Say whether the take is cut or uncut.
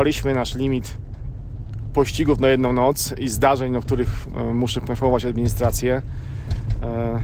uncut